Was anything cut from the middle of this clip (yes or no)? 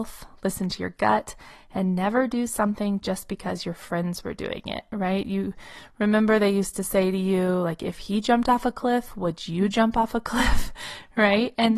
no